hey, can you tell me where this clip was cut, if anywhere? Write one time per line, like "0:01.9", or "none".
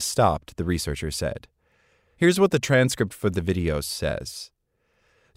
none